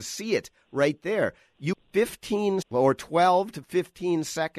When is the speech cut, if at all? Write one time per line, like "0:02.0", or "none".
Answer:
0:01.7
0:02.6